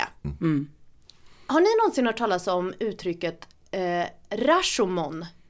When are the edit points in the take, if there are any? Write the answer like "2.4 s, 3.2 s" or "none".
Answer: none